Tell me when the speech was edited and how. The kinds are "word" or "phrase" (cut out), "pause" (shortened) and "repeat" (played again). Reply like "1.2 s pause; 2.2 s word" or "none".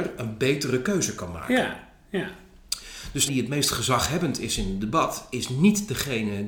3.3 s word